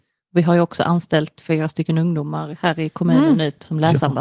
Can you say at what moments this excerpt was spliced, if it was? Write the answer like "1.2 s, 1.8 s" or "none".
none